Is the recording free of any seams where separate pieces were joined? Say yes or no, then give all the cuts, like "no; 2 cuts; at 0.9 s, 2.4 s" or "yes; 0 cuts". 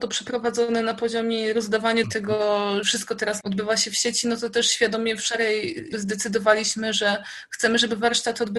no; 4 cuts; at 2.0 s, 2.8 s, 3.4 s, 5.9 s